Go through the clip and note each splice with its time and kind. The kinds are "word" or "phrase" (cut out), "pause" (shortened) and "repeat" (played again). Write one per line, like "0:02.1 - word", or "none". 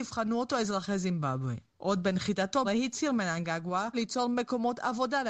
0:02.6 - word
0:03.9 - word